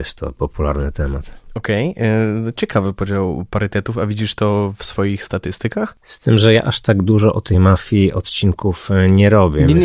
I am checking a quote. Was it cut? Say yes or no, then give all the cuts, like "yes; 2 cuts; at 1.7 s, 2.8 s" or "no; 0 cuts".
no; 0 cuts